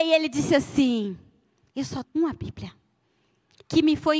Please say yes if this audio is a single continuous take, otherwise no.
no